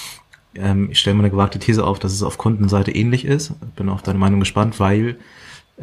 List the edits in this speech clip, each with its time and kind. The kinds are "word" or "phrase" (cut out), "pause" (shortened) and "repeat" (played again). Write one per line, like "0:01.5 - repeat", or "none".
none